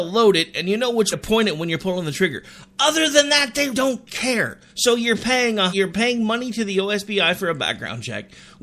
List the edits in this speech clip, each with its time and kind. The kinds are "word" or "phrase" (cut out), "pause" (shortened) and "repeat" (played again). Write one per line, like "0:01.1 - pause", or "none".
0:01.1 - word
0:03.7 - word
0:04.7 - pause
0:05.7 - word